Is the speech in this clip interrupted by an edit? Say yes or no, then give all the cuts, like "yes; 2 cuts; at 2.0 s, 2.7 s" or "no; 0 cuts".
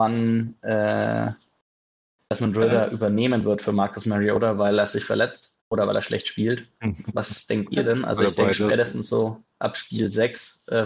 yes; 1 cut; at 5.6 s